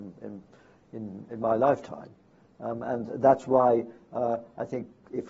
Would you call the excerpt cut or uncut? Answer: uncut